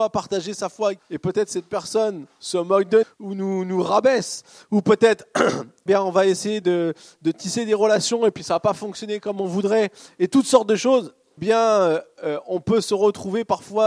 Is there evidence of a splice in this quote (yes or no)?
yes